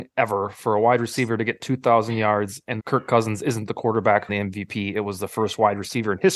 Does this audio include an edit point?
yes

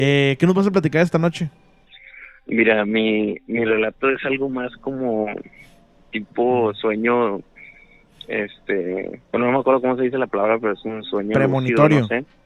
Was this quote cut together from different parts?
yes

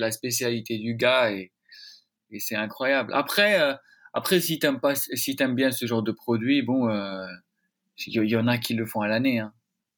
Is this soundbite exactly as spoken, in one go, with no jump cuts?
yes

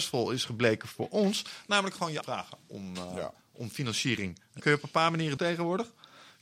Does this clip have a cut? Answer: yes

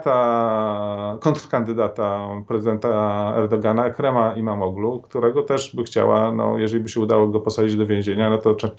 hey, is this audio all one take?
yes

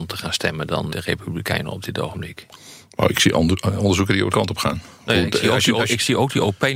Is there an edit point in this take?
yes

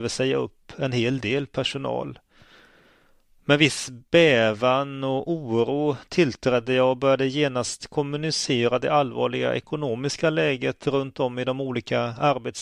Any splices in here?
no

